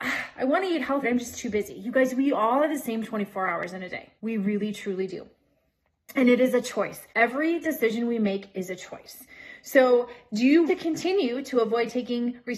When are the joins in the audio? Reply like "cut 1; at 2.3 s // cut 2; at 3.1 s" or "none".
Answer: cut 1; at 1.0 s // cut 2; at 4.2 s // cut 3; at 7.1 s // cut 4; at 10.7 s